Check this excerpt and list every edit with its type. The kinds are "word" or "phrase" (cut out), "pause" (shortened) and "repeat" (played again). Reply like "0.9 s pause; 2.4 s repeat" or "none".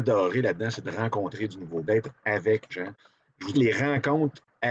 1.9 s word; 2.7 s word; 3.5 s word